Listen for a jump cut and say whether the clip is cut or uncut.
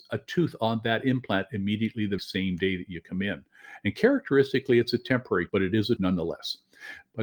cut